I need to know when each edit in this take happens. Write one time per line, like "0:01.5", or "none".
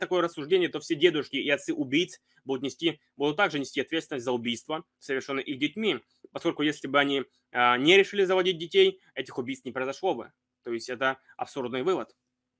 none